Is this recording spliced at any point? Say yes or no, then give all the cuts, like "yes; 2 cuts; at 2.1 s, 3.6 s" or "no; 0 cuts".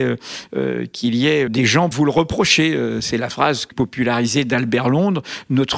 yes; 4 cuts; at 1.5 s, 1.9 s, 3.3 s, 3.7 s